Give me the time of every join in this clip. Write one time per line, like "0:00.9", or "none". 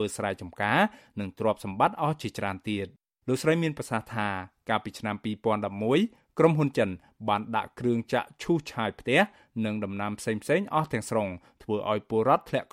none